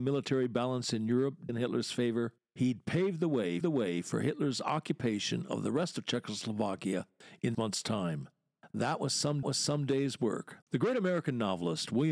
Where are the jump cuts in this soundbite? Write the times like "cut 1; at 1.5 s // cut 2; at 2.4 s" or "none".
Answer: cut 1; at 1.5 s // cut 2; at 2.4 s // cut 3; at 3.6 s // cut 4; at 7.5 s // cut 5; at 9.4 s // cut 6; at 10.6 s